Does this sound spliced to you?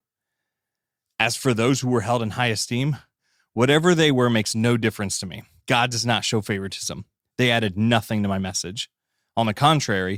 no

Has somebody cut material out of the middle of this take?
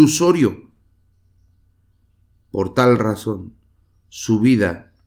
no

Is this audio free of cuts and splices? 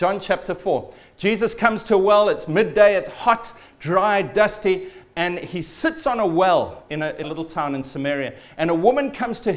no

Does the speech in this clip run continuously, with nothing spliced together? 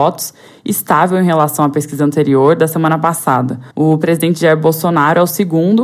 no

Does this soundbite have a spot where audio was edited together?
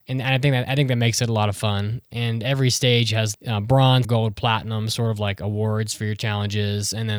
yes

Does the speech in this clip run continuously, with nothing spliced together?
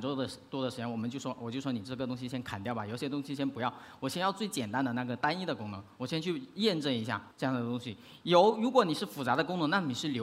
no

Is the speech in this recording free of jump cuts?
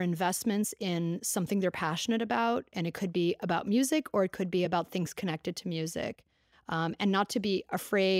yes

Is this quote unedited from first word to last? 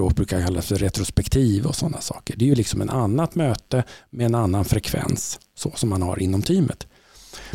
yes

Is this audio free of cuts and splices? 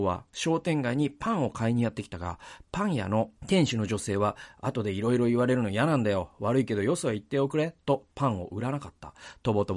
no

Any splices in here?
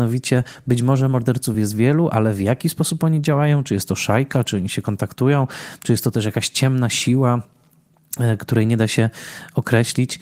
no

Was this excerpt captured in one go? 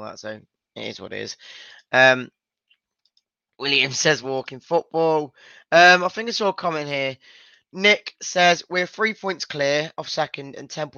yes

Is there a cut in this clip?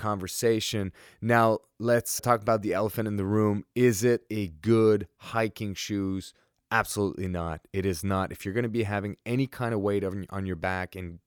yes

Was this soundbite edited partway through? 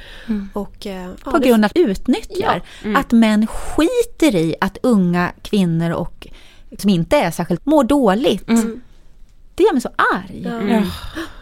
yes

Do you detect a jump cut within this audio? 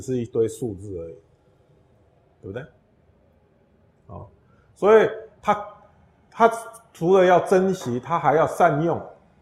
no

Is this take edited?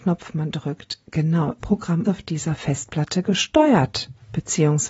yes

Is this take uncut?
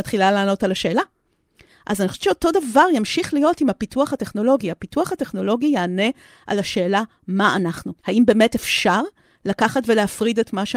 no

